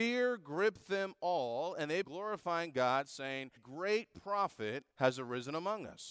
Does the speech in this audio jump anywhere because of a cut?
yes; 3 cuts; at 2.0 s, 3.6 s, 4.9 s

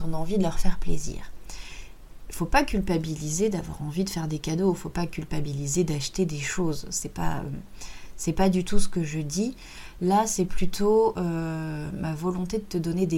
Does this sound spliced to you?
no; 0 cuts

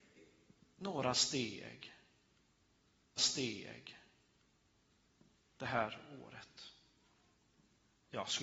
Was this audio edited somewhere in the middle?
yes; 2 cuts; at 3.2 s, 7.3 s

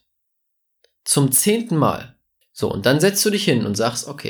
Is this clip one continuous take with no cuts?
no; 1 cut; at 2.4 s

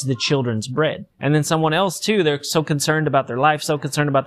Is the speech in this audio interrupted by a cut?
yes; 1 cut; at 1.1 s

